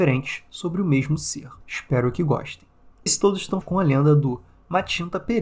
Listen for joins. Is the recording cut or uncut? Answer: cut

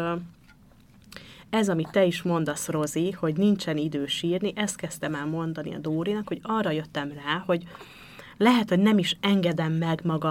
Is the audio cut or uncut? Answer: uncut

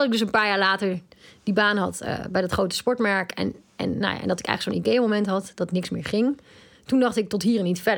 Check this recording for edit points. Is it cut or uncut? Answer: uncut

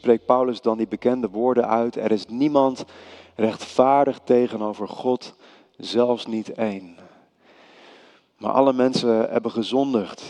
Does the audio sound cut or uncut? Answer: uncut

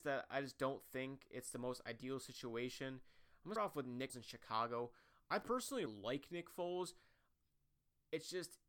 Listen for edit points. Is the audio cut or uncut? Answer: cut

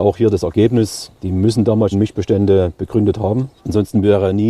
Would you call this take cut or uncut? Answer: cut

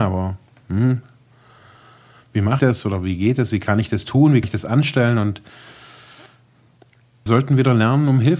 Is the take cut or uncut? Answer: cut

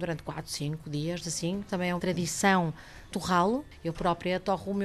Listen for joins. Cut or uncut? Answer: cut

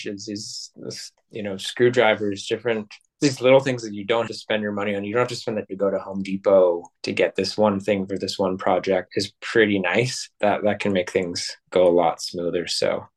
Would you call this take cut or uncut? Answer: cut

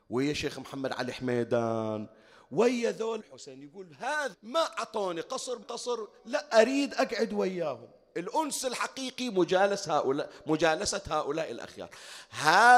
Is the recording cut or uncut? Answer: cut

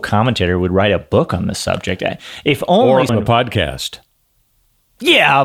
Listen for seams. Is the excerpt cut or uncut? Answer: cut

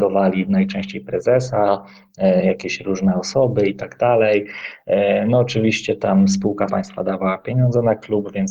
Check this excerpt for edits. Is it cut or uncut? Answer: cut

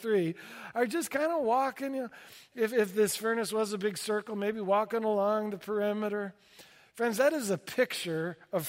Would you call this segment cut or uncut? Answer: uncut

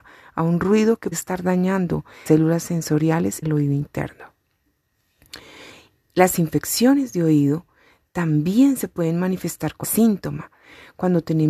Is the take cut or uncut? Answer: cut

